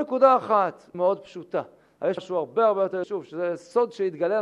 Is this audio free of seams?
no; 3 cuts; at 0.9 s, 2.2 s, 3.0 s

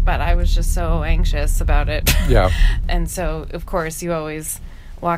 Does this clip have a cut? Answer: no; 0 cuts

